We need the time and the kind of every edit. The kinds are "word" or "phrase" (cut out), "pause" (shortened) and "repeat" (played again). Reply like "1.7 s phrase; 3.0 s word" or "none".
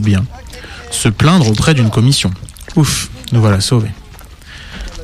none